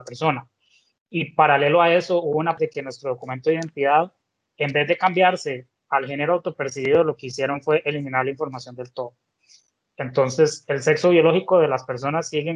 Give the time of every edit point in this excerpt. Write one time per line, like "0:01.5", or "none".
0:02.6